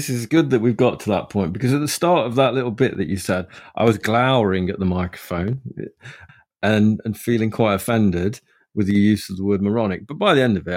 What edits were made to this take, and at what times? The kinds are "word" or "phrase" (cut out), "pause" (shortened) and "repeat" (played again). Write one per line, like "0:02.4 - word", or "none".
none

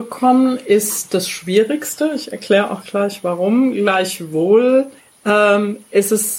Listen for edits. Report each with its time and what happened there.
0:05.0 - pause

